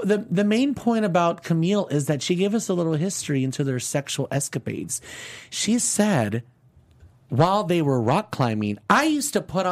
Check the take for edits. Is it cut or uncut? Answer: uncut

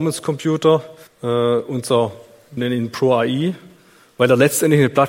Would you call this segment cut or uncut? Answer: cut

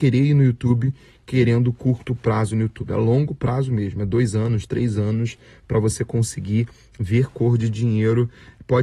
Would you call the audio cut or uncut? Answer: uncut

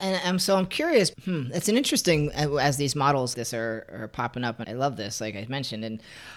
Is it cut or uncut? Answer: cut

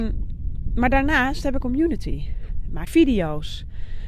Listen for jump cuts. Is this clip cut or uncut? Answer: cut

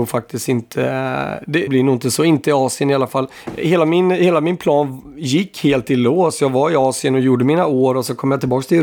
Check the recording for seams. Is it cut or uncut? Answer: cut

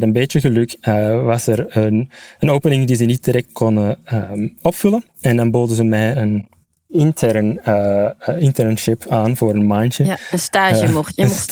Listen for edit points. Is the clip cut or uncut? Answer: cut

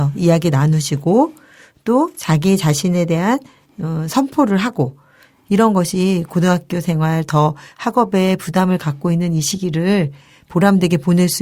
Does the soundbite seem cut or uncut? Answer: uncut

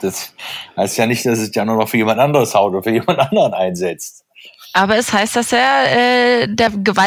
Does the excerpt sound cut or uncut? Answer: uncut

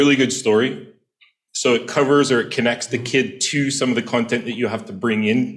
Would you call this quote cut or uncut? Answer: uncut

